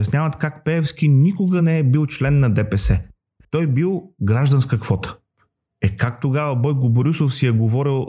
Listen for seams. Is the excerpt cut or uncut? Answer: uncut